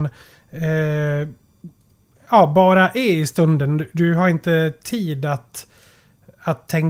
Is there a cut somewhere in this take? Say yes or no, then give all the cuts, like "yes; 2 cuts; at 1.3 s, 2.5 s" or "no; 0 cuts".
no; 0 cuts